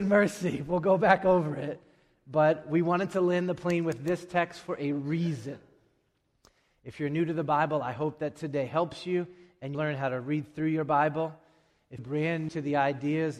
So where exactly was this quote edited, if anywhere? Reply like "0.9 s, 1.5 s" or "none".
9.7 s, 12.0 s, 12.5 s